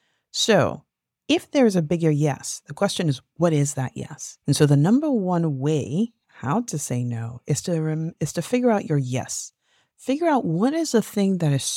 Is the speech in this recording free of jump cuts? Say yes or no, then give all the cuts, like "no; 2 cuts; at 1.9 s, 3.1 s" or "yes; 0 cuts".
no; 1 cut; at 4.4 s